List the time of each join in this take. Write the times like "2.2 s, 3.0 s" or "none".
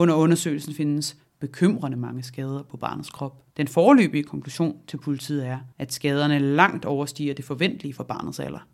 3.5 s, 5.7 s